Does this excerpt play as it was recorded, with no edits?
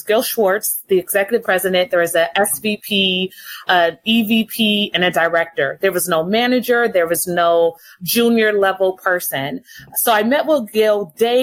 no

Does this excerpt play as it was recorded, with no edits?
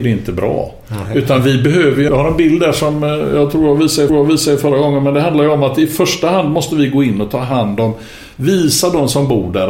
no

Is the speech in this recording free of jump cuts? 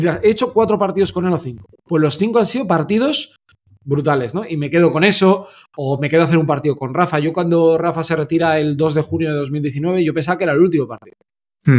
yes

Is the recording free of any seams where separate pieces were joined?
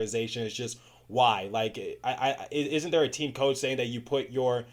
yes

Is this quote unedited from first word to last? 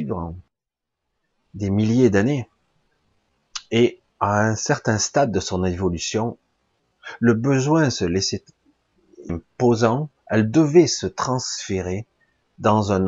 no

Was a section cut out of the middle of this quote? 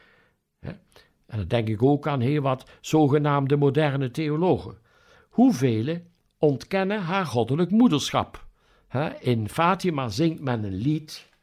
no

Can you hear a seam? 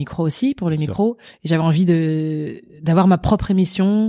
no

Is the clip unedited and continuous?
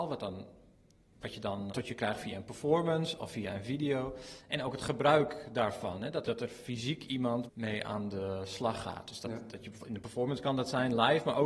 no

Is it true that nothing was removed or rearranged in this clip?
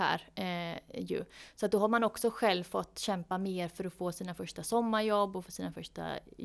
yes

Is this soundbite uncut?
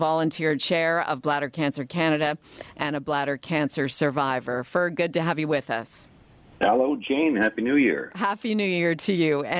yes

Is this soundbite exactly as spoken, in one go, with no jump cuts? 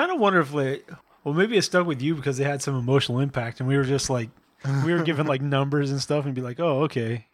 yes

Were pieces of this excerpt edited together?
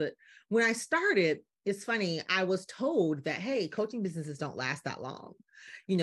no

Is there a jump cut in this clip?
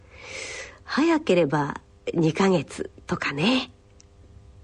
no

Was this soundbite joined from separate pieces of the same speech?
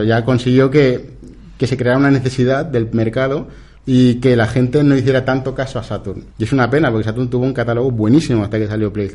yes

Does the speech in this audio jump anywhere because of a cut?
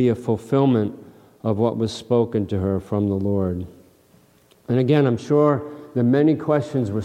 no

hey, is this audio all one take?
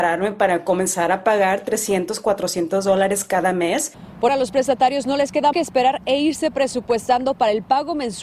no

